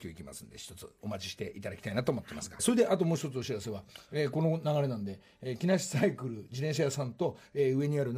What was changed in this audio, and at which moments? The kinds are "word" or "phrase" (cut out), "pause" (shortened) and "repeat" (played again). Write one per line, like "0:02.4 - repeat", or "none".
0:02.6 - phrase